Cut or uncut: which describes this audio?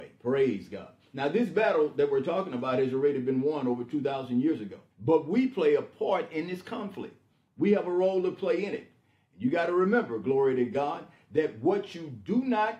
cut